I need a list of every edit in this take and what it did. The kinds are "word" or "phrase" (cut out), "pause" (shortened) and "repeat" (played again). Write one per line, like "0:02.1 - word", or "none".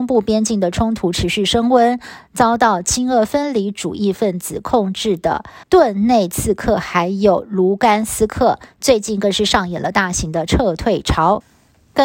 0:05.6 - pause